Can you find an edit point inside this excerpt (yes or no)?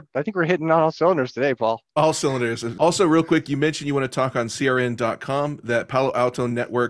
no